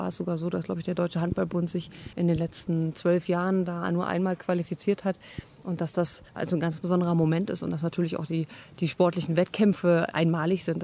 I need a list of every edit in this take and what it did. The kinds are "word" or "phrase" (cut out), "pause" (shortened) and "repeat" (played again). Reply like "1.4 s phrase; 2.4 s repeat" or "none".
2.1 s pause; 6.3 s pause